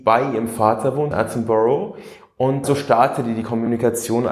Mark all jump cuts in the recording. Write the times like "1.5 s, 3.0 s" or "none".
1.1 s, 2.6 s